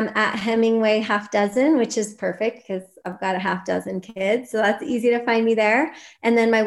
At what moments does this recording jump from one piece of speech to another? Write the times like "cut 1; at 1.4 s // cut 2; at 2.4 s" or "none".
none